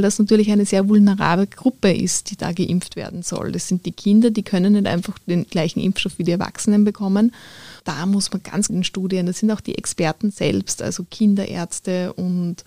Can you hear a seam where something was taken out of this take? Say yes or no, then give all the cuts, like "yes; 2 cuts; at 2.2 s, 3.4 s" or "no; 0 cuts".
yes; 2 cuts; at 7.8 s, 8.7 s